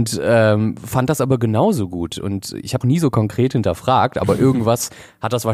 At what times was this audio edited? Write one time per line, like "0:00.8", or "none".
0:02.8